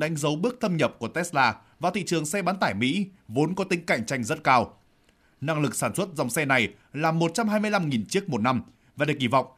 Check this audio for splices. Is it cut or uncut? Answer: uncut